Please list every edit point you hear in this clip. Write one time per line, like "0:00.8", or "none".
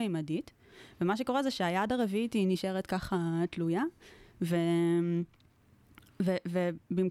none